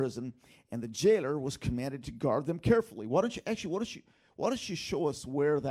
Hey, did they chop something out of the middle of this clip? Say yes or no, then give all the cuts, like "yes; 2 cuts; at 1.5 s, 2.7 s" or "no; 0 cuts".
no; 0 cuts